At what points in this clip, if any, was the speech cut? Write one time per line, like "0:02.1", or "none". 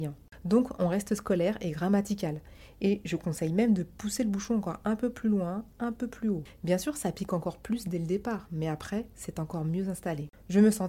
none